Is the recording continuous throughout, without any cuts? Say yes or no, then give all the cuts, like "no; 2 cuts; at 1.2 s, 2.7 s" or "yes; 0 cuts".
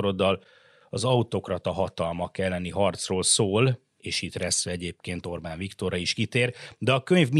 yes; 0 cuts